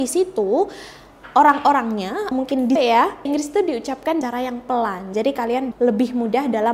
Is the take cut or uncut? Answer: cut